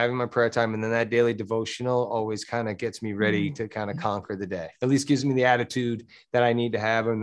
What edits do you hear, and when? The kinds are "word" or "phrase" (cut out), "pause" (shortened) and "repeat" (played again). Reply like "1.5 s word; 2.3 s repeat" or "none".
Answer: 4.8 s pause